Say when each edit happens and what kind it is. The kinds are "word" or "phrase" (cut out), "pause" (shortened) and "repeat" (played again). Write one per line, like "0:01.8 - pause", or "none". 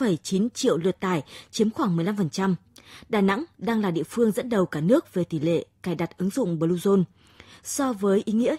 none